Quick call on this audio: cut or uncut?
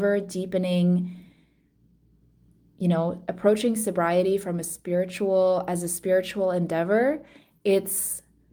uncut